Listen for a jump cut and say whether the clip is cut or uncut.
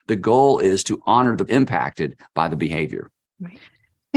cut